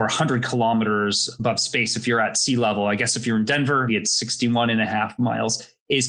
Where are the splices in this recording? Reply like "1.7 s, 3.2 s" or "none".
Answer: 3.9 s